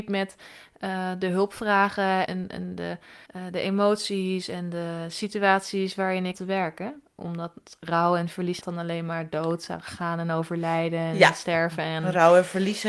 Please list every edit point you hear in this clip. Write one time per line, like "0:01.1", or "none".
0:02.3
0:03.3
0:06.3
0:08.6